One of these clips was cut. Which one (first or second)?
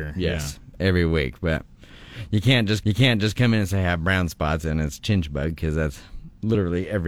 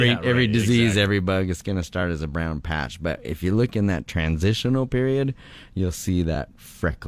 first